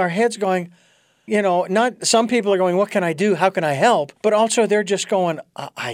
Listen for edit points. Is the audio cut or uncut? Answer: cut